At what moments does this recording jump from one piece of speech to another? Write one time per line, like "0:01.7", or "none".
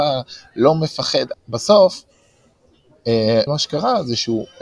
0:01.3
0:03.5